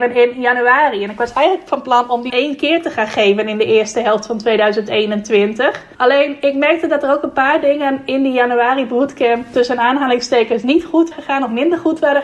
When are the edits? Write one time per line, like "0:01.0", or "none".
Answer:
0:02.3
0:05.9
0:11.1